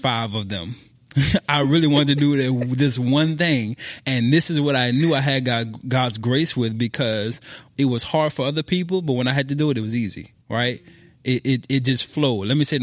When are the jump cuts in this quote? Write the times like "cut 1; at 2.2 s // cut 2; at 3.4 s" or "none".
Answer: cut 1; at 10.4 s